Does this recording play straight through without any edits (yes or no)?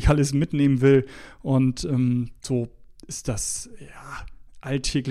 yes